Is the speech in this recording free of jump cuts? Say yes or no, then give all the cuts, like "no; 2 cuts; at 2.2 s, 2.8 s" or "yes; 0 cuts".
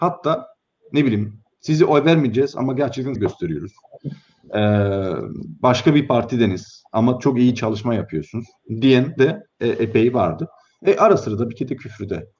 no; 1 cut; at 3.1 s